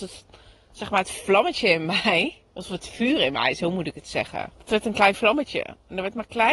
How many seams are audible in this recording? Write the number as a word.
two